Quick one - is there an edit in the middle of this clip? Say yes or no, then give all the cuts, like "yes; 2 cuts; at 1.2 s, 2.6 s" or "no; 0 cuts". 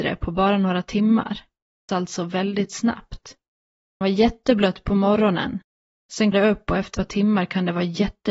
yes; 4 cuts; at 1.9 s, 4.0 s, 6.3 s, 6.9 s